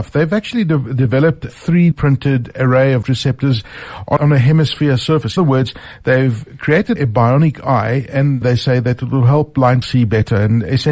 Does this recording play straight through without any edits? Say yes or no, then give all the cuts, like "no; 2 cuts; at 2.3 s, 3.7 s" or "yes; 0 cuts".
no; 8 cuts; at 1.5 s, 1.9 s, 3.0 s, 4.2 s, 5.4 s, 7.0 s, 8.4 s, 9.8 s